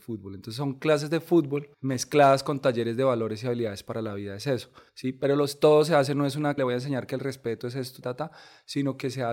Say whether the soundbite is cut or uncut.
cut